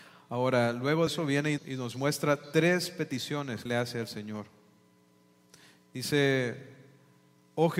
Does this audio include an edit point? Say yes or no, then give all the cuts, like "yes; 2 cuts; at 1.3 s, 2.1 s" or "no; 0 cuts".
yes; 3 cuts; at 1.1 s, 1.6 s, 3.7 s